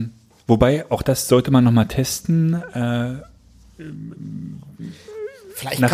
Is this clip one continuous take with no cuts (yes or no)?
yes